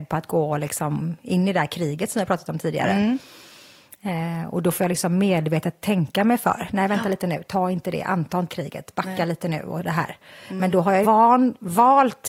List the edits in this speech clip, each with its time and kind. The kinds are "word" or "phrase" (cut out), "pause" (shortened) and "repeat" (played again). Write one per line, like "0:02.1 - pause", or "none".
0:08.5 - word
0:11.0 - word